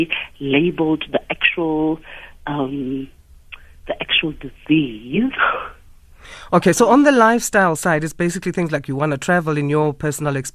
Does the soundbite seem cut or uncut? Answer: uncut